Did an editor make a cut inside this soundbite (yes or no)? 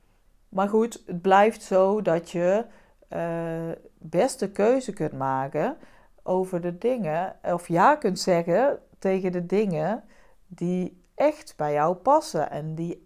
no